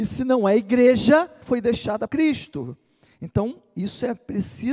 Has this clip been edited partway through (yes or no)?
yes